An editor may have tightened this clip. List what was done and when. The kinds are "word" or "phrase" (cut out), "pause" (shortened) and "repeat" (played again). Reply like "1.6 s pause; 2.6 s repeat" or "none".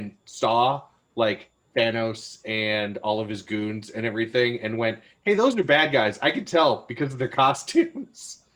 none